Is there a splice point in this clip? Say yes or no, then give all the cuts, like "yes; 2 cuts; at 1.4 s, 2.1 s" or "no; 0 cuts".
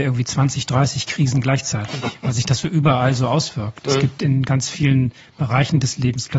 no; 0 cuts